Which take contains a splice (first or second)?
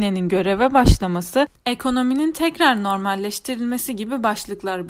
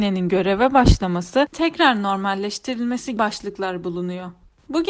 second